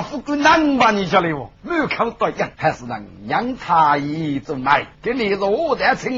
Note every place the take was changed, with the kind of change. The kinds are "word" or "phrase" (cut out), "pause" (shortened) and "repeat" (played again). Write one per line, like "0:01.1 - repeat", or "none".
0:01.5 - pause
0:02.5 - pause
0:04.9 - pause